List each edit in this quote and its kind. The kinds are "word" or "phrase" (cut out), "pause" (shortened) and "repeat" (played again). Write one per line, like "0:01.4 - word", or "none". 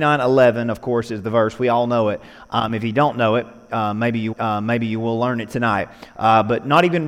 0:04.3 - repeat

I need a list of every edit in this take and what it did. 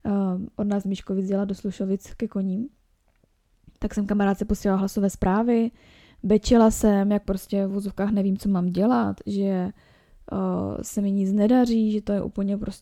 none

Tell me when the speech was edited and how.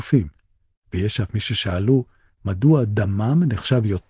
none

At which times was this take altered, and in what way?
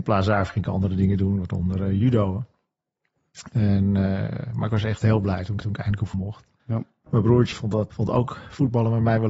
0:05.6 - repeat
0:06.1 - word
0:06.6 - pause
0:07.5 - word
0:07.9 - word

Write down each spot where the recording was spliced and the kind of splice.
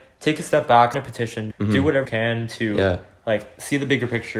0:00.9 - word
0:01.5 - word
0:02.0 - word

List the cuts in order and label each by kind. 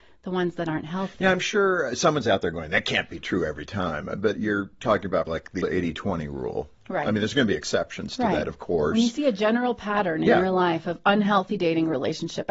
0:05.3 - word
0:05.6 - word

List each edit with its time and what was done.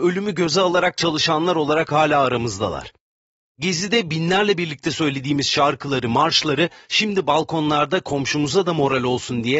none

